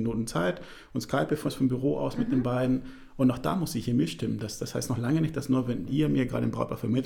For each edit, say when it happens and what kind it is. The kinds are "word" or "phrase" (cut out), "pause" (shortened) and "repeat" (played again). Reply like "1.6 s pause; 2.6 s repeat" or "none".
1.5 s word; 5.9 s word